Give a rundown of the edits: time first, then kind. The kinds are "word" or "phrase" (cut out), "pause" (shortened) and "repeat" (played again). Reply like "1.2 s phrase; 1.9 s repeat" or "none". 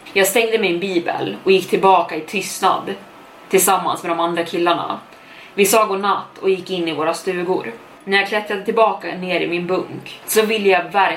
none